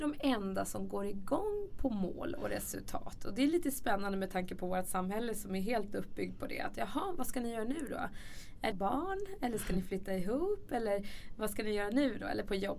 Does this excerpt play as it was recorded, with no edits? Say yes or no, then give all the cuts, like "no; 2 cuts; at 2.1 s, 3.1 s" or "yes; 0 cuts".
no; 1 cut; at 8.7 s